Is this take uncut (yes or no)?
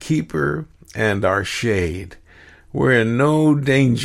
yes